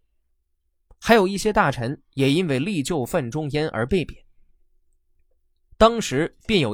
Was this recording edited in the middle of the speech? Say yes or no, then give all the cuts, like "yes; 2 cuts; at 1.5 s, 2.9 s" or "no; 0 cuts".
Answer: no; 0 cuts